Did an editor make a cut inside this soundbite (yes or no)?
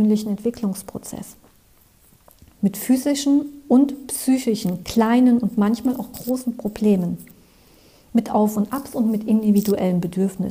no